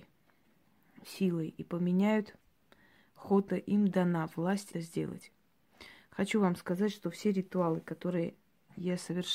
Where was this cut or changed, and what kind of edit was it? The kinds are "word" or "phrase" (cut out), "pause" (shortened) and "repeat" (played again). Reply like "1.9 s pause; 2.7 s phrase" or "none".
3.5 s phrase; 4.7 s word